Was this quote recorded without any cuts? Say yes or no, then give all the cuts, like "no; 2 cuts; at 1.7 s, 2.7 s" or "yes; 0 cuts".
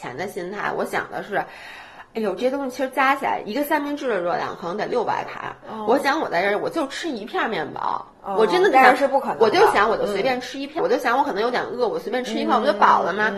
no; 2 cuts; at 8.1 s, 10.8 s